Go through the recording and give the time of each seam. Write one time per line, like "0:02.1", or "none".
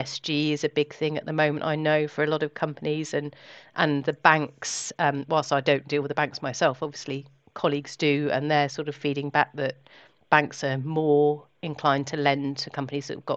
none